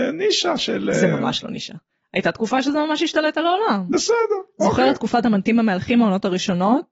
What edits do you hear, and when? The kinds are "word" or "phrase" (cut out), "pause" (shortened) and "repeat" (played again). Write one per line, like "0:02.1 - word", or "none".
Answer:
none